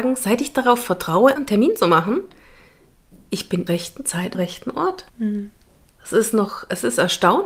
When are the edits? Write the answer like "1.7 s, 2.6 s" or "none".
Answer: 1.4 s, 3.7 s, 4.3 s, 5.1 s